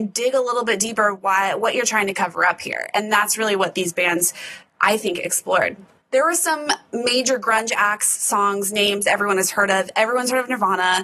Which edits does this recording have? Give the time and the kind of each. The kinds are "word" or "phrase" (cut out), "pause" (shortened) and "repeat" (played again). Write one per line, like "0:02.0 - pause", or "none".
none